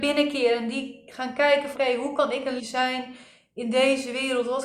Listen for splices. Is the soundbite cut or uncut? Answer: cut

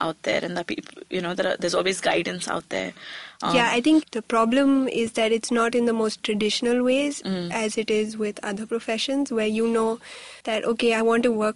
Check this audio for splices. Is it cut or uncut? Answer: cut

